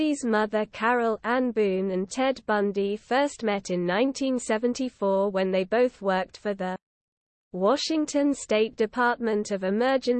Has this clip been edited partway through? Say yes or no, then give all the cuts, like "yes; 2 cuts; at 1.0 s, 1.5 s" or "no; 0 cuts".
no; 0 cuts